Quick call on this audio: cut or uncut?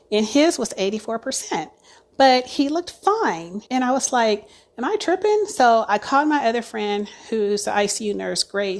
cut